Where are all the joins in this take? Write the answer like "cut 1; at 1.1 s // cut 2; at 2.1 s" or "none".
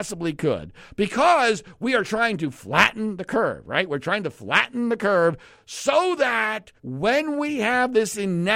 cut 1; at 6.8 s